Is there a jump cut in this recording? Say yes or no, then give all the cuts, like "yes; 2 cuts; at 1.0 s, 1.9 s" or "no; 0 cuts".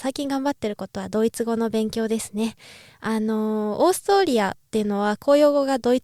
no; 0 cuts